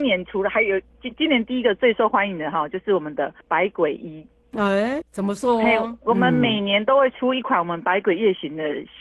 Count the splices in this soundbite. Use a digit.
2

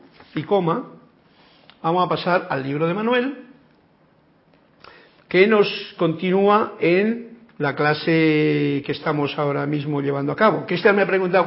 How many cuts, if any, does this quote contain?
0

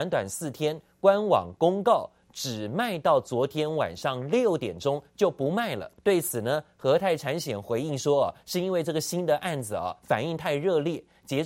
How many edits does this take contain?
1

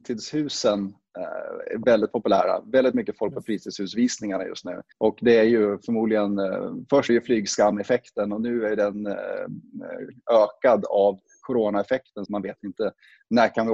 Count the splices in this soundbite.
3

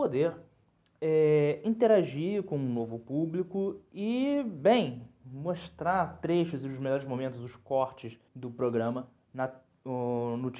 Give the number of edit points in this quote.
1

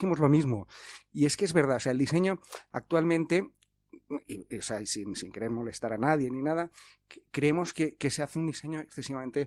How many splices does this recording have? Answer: 0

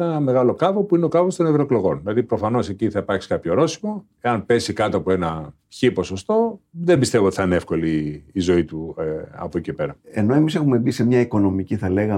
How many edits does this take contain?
0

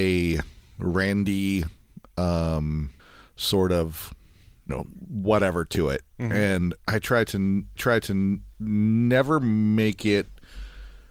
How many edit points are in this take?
4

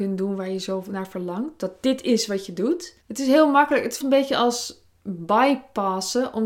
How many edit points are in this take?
2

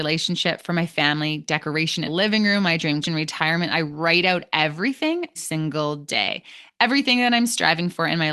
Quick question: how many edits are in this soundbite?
3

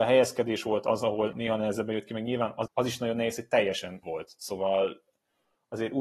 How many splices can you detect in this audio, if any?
3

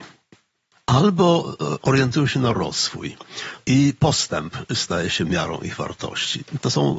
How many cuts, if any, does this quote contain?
0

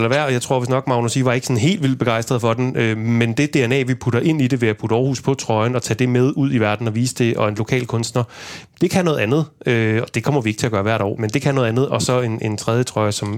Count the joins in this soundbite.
1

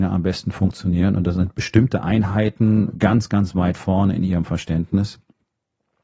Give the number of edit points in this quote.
1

